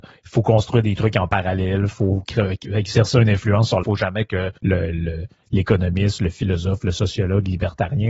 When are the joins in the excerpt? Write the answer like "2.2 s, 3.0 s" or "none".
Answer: 3.8 s, 4.6 s